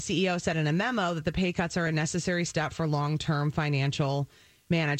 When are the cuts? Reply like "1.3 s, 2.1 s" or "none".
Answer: none